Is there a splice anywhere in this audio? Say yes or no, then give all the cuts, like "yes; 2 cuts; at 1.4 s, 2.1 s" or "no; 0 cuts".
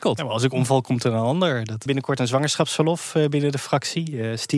yes; 1 cut; at 1.9 s